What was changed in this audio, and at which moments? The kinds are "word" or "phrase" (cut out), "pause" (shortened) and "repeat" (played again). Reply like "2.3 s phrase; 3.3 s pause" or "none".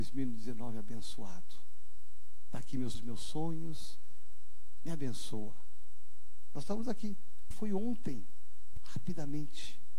2.9 s word; 7.5 s phrase; 8.8 s word